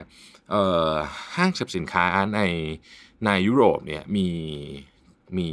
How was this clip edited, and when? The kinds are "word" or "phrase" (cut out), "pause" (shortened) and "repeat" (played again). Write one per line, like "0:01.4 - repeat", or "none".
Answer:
none